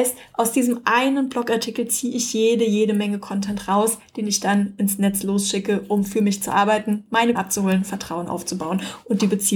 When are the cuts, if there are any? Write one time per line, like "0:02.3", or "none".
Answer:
0:07.4